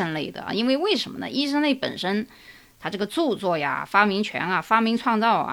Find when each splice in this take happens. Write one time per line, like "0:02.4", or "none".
none